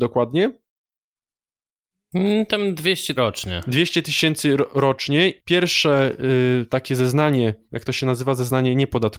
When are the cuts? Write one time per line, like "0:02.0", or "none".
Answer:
0:03.2
0:05.4
0:07.6